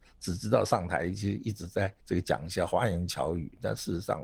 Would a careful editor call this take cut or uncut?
cut